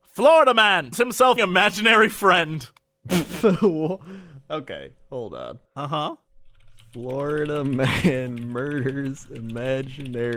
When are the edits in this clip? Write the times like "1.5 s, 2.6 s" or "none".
0.9 s, 1.4 s, 5.7 s